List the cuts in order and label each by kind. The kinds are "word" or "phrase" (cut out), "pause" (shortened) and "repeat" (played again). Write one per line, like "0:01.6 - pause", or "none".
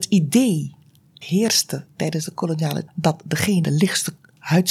0:01.2 - word
0:02.9 - word
0:03.6 - word